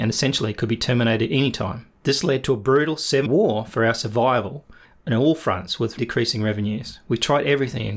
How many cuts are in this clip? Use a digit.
4